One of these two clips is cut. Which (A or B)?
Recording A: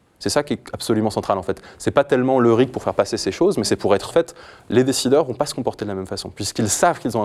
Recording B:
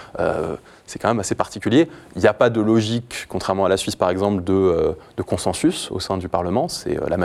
A